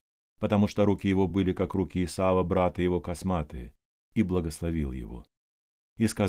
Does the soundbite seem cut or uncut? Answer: uncut